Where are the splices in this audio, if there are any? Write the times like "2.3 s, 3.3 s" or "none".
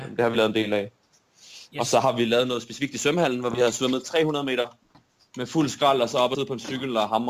none